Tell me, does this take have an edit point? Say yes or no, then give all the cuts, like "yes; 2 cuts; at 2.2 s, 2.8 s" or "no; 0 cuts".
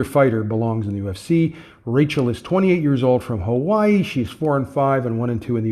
no; 0 cuts